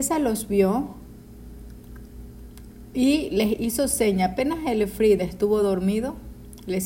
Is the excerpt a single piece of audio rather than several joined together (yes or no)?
yes